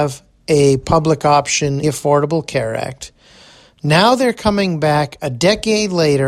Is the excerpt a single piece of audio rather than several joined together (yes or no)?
no